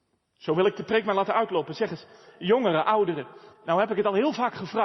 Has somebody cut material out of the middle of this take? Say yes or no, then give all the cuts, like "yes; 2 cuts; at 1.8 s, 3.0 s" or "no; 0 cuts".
yes; 1 cut; at 3.5 s